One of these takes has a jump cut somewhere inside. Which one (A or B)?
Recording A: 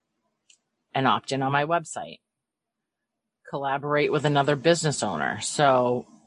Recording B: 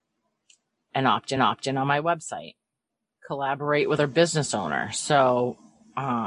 B